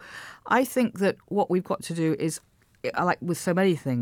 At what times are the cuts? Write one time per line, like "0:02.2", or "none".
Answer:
none